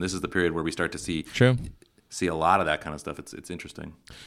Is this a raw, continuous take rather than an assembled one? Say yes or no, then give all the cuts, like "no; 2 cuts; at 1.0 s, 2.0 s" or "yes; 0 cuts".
no; 1 cut; at 1.3 s